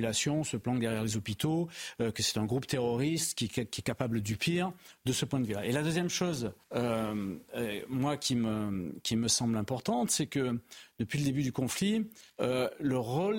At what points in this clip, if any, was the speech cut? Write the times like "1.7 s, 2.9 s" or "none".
6.6 s, 12.3 s